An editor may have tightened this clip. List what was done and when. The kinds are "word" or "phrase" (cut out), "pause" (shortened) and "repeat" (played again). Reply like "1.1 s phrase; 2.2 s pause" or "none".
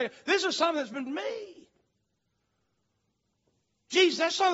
1.1 s word